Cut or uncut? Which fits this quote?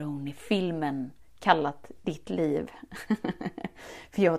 uncut